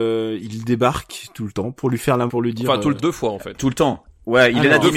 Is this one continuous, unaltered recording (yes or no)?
no